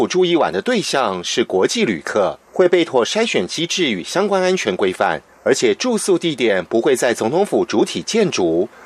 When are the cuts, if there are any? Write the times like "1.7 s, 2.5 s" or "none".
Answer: 2.5 s